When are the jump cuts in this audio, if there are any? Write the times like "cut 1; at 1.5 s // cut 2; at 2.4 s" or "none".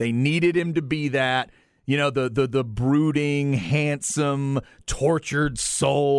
none

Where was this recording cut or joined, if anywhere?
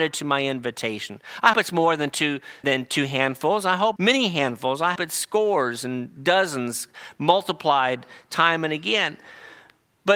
cut 1; at 1.5 s // cut 2; at 2.6 s // cut 3; at 4.0 s // cut 4; at 5.0 s

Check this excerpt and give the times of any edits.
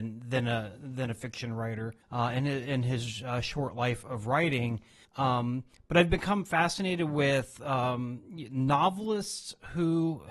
cut 1; at 2.0 s // cut 2; at 5.0 s

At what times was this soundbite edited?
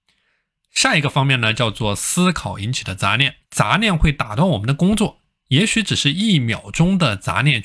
cut 1; at 3.4 s

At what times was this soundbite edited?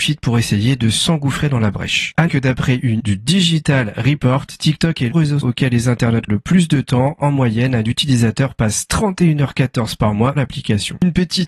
cut 1; at 2.3 s // cut 2; at 3.0 s // cut 3; at 5.1 s // cut 4; at 5.4 s // cut 5; at 6.3 s // cut 6; at 10.4 s

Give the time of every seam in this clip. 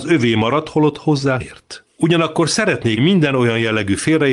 cut 1; at 1.4 s // cut 2; at 3.0 s

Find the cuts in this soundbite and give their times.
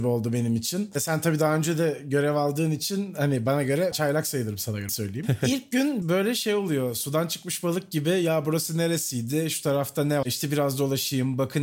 cut 1; at 3.9 s // cut 2; at 4.9 s // cut 3; at 6.0 s // cut 4; at 10.2 s

